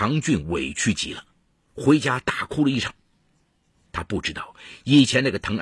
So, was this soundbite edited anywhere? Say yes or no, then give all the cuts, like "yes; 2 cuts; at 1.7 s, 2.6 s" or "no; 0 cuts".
no; 0 cuts